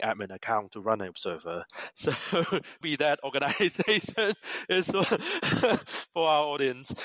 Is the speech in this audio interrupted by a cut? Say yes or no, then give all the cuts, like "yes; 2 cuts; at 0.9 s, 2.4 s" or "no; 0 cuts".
yes; 2 cuts; at 1.1 s, 2.8 s